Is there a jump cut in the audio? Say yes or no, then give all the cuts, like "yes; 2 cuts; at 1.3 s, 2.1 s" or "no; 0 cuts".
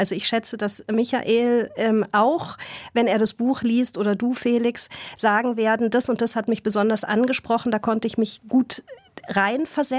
no; 0 cuts